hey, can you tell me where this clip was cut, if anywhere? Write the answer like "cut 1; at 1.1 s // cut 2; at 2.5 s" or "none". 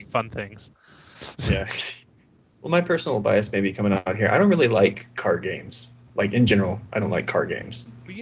none

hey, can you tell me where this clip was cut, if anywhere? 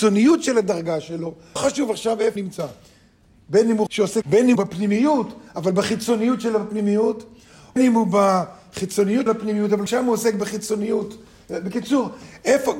cut 1; at 1.6 s // cut 2; at 2.4 s // cut 3; at 3.9 s // cut 4; at 4.2 s // cut 5; at 4.6 s // cut 6; at 7.8 s // cut 7; at 9.3 s // cut 8; at 9.9 s

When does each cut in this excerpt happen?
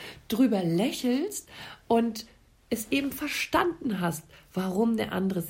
none

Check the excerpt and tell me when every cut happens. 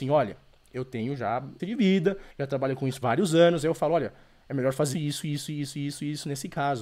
cut 1; at 1.6 s // cut 2; at 2.3 s // cut 3; at 3.0 s // cut 4; at 4.9 s

